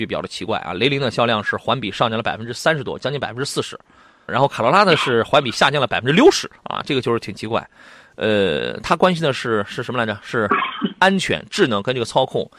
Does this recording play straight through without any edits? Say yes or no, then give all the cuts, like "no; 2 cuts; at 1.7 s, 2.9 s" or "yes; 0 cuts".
no; 2 cuts; at 4.3 s, 6.6 s